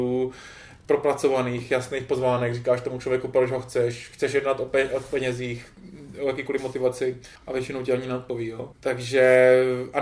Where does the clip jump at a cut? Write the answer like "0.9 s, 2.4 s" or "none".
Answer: 7.4 s, 8.7 s